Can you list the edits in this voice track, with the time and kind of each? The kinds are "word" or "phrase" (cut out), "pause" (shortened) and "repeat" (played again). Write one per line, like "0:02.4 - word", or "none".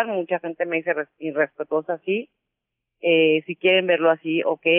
none

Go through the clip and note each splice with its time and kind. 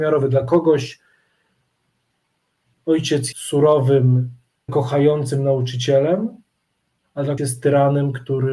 0:03.3 - word
0:04.7 - word
0:07.4 - word

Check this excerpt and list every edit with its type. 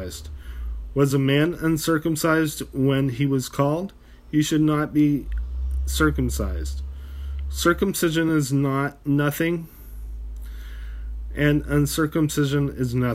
none

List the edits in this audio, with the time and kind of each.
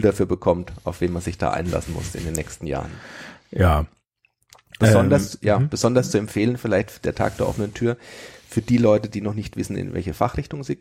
none

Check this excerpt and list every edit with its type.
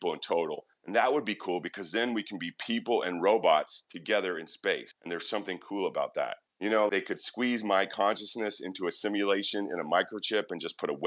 0:06.9 - word

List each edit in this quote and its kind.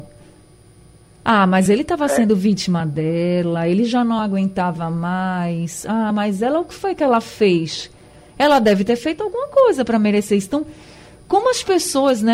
none

